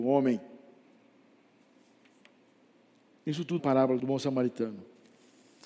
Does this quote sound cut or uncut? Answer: cut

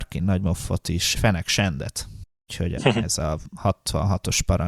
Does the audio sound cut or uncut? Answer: cut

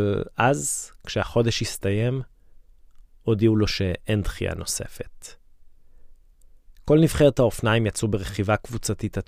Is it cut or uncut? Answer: uncut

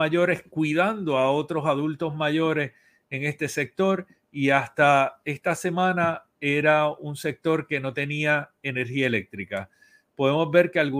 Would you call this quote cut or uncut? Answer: uncut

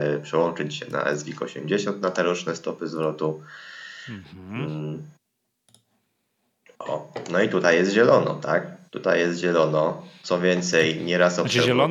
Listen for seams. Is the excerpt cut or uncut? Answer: uncut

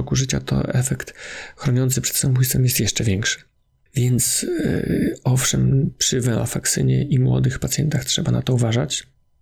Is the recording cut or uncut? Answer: uncut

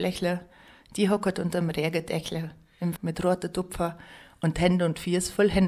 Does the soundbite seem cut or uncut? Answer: cut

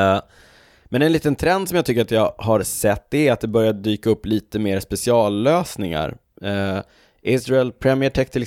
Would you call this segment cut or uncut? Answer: uncut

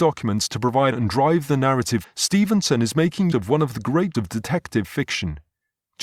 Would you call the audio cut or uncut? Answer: cut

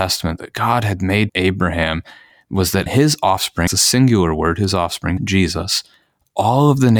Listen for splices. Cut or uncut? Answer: cut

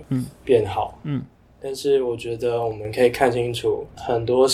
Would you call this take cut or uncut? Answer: uncut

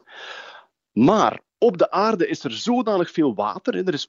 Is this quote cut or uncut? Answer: uncut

